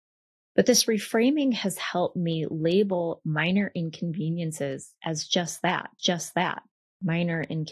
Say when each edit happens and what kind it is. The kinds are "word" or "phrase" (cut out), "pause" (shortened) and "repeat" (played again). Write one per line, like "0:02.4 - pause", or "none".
0:06.0 - repeat